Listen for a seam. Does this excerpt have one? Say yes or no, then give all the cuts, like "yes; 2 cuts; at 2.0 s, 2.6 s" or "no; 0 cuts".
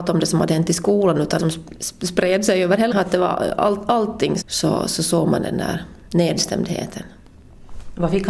yes; 3 cuts; at 1.4 s, 2.9 s, 4.4 s